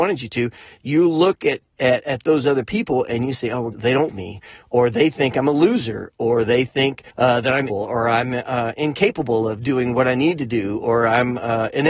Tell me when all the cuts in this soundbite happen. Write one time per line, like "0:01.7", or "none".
0:03.7
0:04.1
0:07.1
0:07.7